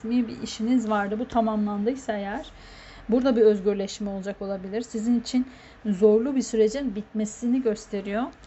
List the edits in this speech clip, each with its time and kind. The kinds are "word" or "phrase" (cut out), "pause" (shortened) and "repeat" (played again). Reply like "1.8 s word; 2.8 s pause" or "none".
none